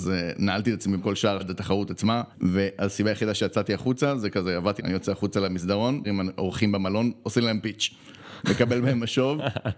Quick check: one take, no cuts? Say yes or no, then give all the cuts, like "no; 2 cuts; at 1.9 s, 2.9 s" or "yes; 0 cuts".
no; 5 cuts; at 1.0 s, 1.4 s, 2.3 s, 4.8 s, 6.0 s